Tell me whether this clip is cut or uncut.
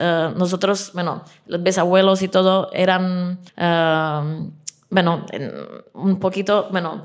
cut